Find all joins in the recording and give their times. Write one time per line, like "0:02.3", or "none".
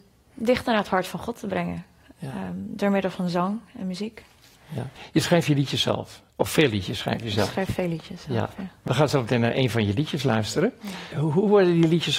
none